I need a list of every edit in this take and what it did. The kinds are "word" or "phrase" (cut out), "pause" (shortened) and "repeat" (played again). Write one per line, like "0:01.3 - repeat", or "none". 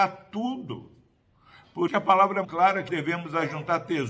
0:01.9 - word
0:02.4 - word
0:02.9 - word